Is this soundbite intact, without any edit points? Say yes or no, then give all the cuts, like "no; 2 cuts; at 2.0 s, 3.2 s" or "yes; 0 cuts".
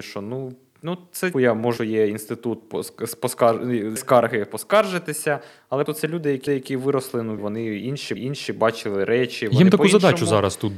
no; 7 cuts; at 1.3 s, 1.8 s, 4.0 s, 5.9 s, 6.5 s, 7.4 s, 8.2 s